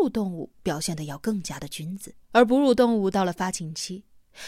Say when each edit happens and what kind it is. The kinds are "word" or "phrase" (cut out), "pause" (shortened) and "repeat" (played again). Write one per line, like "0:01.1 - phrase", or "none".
0:02.2 - pause